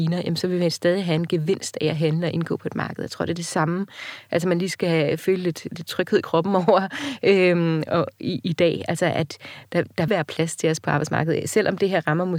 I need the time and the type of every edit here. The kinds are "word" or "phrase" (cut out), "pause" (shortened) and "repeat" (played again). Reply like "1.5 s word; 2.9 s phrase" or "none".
10.1 s word